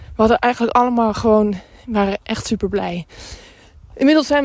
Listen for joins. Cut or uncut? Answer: uncut